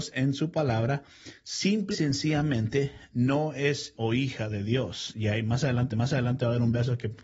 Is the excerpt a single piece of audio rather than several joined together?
no; 3 cuts; at 1.9 s, 3.9 s, 5.9 s

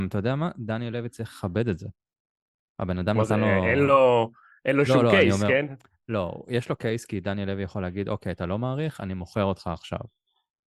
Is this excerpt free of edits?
yes; 0 cuts

